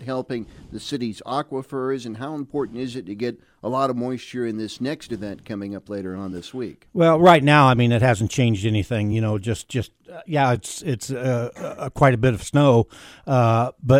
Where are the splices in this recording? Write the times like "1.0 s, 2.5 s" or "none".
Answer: none